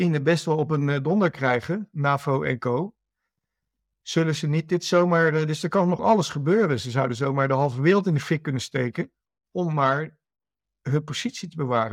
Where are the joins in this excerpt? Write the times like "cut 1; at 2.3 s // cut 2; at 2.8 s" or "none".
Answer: cut 1; at 6.0 s

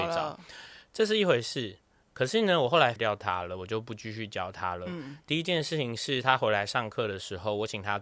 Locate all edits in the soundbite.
cut 1; at 3.0 s

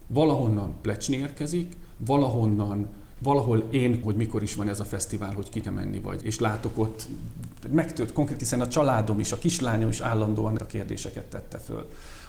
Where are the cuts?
cut 1; at 3.2 s // cut 2; at 4.0 s // cut 3; at 5.6 s // cut 4; at 6.2 s // cut 5; at 8.4 s // cut 6; at 10.6 s

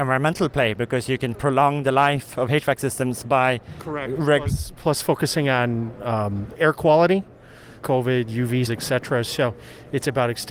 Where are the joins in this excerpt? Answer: cut 1; at 7.8 s // cut 2; at 8.7 s

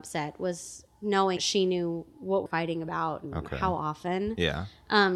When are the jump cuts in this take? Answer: cut 1; at 1.4 s // cut 2; at 2.5 s

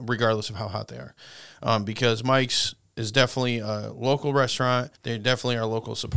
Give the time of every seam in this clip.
cut 1; at 5.0 s

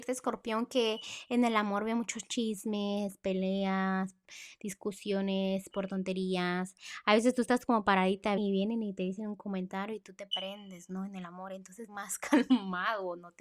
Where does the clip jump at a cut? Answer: cut 1; at 8.4 s // cut 2; at 11.9 s

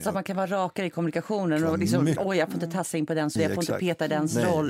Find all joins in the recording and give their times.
cut 1; at 2.2 s // cut 2; at 3.4 s

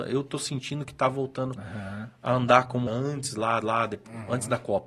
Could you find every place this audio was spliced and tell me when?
cut 1; at 2.9 s // cut 2; at 3.6 s

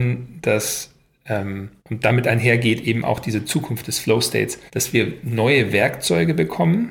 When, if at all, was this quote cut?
cut 1; at 1.8 s // cut 2; at 4.7 s

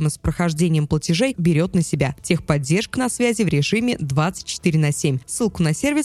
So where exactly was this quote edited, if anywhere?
cut 1; at 1.3 s // cut 2; at 2.9 s

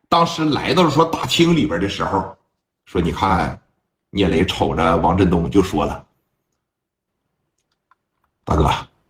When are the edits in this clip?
none

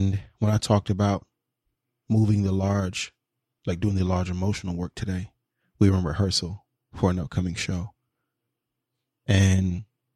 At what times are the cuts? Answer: none

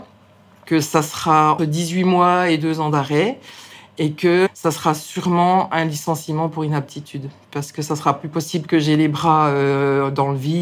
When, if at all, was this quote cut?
cut 1; at 1.6 s

